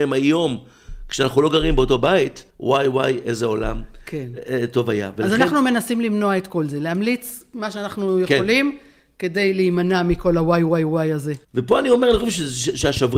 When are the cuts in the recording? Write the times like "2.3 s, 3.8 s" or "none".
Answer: 2.5 s, 11.4 s